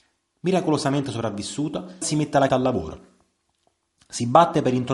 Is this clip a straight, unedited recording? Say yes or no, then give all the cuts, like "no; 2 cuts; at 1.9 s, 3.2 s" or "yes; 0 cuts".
no; 2 cuts; at 2.0 s, 2.5 s